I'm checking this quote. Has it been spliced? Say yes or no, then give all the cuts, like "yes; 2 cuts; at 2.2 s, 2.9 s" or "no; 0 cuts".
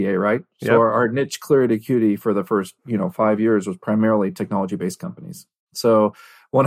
yes; 1 cut; at 2.8 s